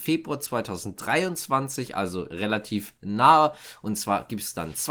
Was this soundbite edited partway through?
yes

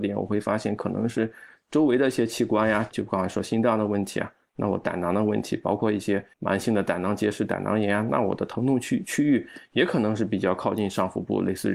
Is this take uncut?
no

